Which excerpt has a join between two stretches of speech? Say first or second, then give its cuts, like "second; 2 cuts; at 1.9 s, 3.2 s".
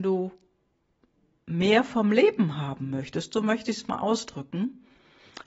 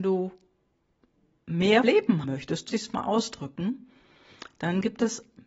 second; 3 cuts; at 1.8 s, 2.2 s, 2.7 s